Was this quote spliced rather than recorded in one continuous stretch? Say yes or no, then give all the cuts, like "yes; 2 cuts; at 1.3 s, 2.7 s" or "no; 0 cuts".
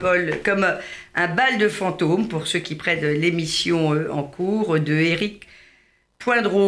no; 0 cuts